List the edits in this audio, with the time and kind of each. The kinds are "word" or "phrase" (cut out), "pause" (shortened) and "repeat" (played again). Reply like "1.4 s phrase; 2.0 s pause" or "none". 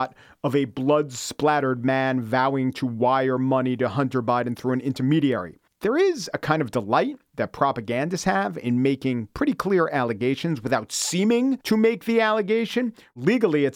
5.7 s pause; 11.6 s pause

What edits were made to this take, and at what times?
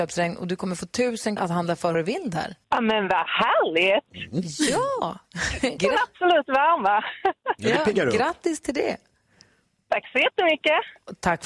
1.4 s word; 1.9 s phrase; 2.6 s pause; 5.8 s word

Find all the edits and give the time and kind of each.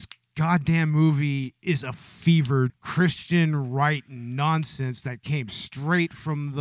1.9 s word; 2.7 s phrase

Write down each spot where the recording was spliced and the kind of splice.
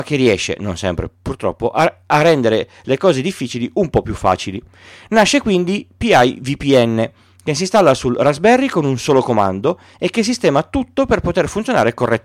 none

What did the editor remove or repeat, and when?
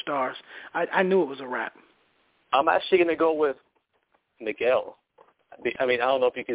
1.9 s pause

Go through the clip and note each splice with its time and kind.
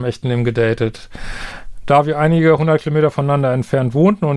none

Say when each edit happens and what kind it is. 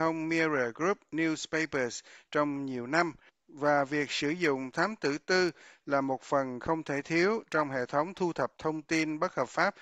none

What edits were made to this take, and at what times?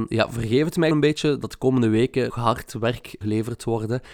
0.9 s word; 2.3 s word; 3.2 s word

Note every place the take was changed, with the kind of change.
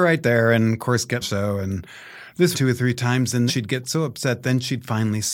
1.2 s phrase; 2.5 s phrase; 3.5 s word

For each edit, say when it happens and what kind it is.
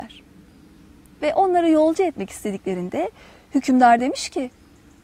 none

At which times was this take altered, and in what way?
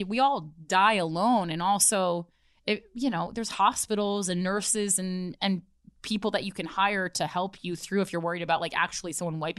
none

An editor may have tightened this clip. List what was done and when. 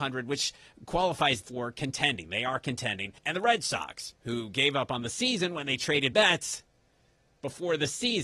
1.4 s word; 3.2 s pause; 4.1 s pause; 6.1 s word

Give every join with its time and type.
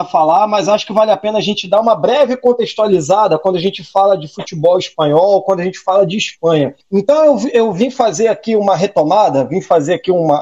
6.8 s pause

